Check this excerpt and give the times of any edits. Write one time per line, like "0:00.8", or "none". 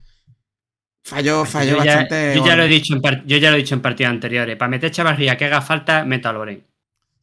none